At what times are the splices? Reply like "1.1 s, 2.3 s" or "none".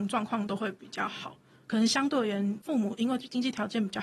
none